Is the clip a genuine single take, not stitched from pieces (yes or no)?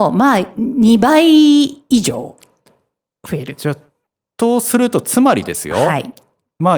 yes